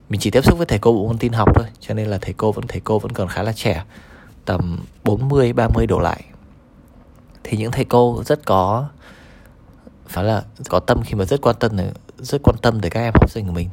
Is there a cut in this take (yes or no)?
yes